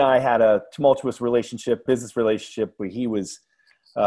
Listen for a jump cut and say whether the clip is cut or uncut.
cut